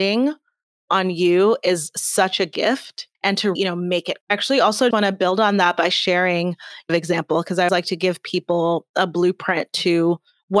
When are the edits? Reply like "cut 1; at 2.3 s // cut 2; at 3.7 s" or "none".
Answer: cut 1; at 3.1 s // cut 2; at 3.6 s // cut 3; at 4.2 s // cut 4; at 4.9 s // cut 5; at 6.9 s // cut 6; at 7.7 s

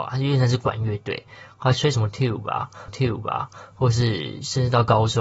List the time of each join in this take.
cut 1; at 2.9 s

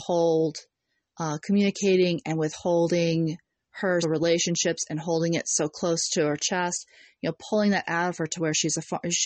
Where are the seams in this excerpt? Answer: cut 1; at 4.0 s

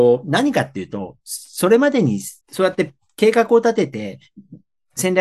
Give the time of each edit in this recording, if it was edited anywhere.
cut 1; at 2.4 s

